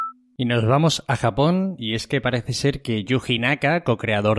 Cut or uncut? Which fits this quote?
uncut